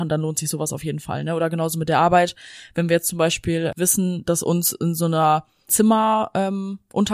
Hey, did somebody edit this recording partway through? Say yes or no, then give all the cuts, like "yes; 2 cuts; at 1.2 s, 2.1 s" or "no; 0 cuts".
yes; 1 cut; at 5.7 s